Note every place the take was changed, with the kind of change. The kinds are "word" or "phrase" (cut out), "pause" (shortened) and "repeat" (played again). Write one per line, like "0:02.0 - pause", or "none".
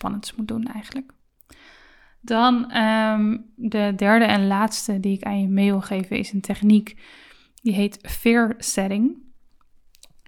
none